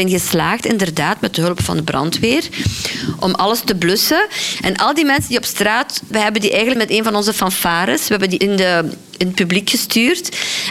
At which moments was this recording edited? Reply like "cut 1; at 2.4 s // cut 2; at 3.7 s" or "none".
cut 1; at 6.1 s // cut 2; at 6.8 s // cut 3; at 8.4 s